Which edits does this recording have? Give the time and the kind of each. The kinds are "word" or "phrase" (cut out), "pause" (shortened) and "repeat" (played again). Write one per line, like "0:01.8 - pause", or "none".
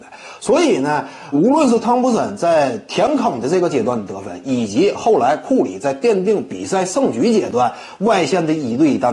0:01.3 - word

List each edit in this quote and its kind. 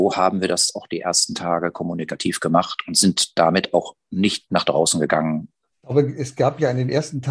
none

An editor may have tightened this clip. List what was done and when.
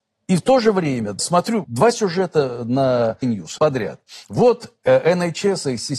0:01.2 - word
0:01.6 - word
0:03.2 - word
0:03.6 - word

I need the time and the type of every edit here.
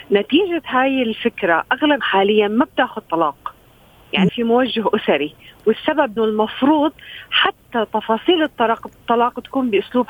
0:02.0 - word
0:03.0 - word
0:04.3 - word
0:06.2 - word

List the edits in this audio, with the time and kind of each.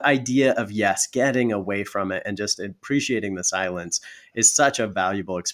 none

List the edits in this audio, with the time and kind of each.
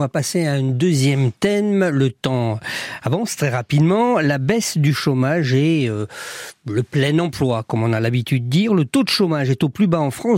none

